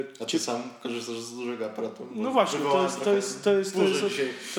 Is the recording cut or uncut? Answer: uncut